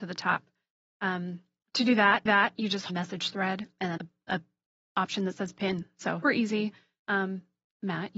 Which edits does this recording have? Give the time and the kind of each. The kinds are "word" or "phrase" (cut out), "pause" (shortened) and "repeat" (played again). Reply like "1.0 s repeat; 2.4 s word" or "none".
2.3 s repeat; 2.9 s phrase; 4.0 s word; 6.2 s word